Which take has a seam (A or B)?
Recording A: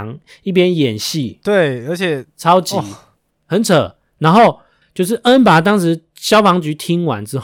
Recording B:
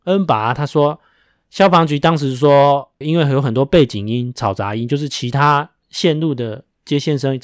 B